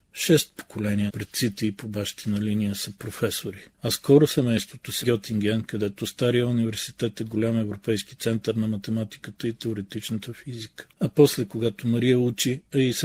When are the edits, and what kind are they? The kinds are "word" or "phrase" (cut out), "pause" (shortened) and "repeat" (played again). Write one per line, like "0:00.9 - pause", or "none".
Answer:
0:01.1 - word
0:05.0 - phrase
0:10.9 - pause